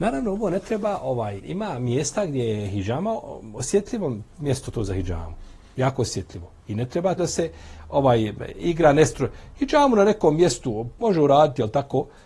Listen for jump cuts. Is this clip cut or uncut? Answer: cut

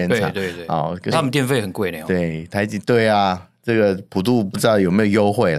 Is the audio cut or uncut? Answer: cut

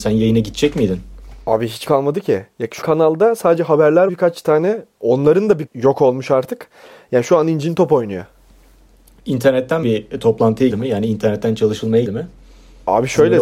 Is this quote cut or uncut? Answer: cut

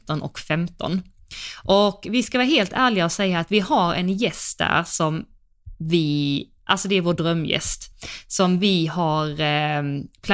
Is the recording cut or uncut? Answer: uncut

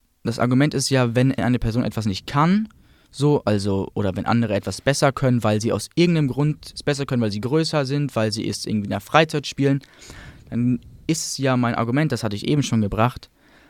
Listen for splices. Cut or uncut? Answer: uncut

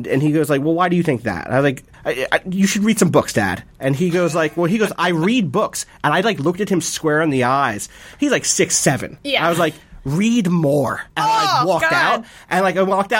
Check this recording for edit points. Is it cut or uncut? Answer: cut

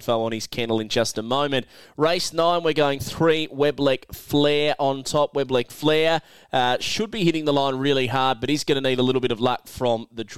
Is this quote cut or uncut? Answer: uncut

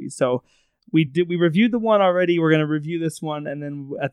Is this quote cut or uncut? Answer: uncut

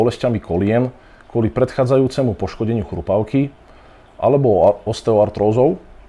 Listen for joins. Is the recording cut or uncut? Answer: uncut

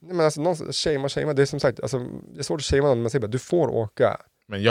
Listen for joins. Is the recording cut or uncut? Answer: uncut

